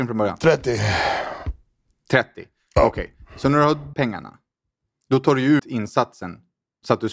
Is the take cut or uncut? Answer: cut